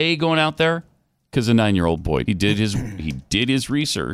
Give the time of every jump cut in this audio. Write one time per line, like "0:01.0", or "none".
0:02.3